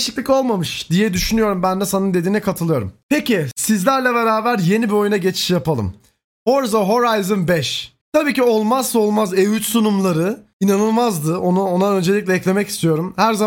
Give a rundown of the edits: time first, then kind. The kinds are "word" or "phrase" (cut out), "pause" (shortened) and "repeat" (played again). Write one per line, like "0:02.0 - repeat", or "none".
0:08.0 - pause